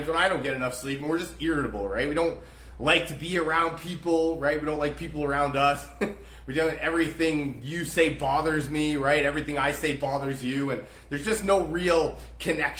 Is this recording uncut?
yes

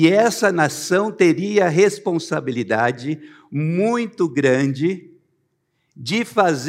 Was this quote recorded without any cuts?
yes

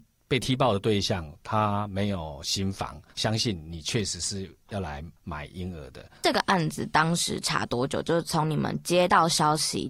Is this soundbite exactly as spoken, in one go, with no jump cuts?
no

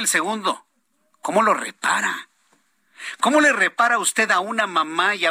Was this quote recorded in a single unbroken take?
yes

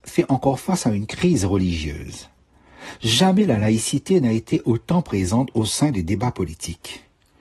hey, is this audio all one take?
yes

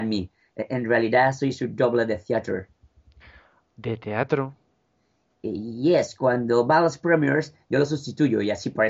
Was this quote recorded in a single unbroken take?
yes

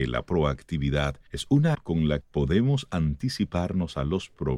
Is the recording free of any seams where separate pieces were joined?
no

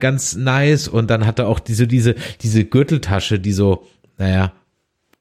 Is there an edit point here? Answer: no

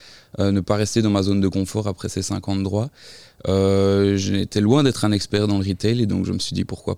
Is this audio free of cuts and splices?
yes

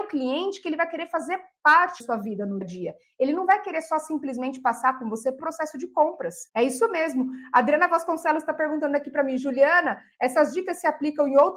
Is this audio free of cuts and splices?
no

